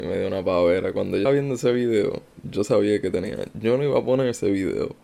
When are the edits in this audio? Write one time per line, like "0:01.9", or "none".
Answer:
0:01.2